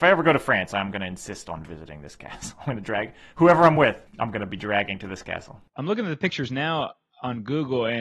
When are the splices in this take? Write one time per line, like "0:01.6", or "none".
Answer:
none